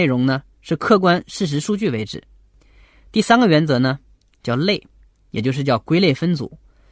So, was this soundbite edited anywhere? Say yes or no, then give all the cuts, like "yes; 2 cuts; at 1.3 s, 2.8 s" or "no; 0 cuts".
no; 0 cuts